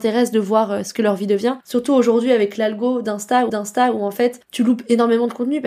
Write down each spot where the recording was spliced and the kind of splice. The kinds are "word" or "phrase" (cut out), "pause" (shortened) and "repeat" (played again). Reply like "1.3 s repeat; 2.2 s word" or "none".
3.5 s repeat

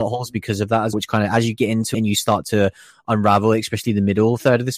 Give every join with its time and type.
0.9 s word; 1.9 s word

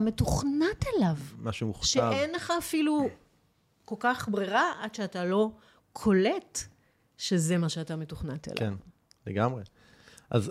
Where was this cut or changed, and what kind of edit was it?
none

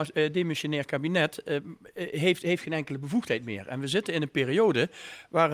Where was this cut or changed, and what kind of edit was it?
none

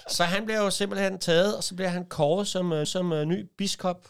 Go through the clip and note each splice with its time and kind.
2.8 s repeat

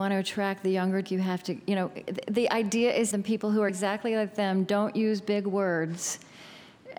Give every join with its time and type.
1.0 s word; 3.1 s phrase; 3.7 s phrase

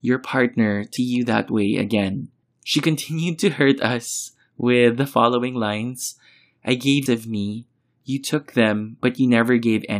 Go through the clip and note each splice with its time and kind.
1.0 s word; 7.1 s phrase

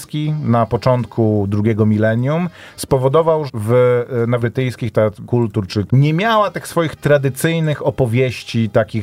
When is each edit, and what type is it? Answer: 3.5 s word; 4.4 s word; 5.2 s word; 5.9 s phrase

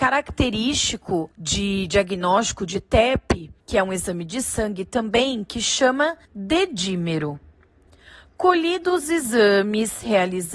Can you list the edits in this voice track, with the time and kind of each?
1.3 s pause; 3.6 s pause; 6.2 s pause

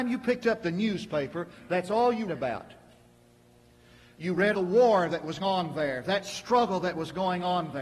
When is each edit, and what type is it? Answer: 2.3 s word; 4.5 s word; 5.4 s word

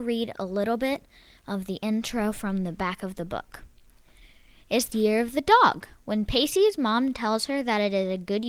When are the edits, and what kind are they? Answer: 4.9 s word

